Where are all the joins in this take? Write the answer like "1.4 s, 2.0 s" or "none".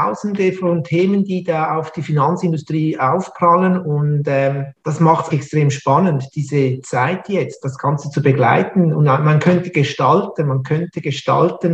5.3 s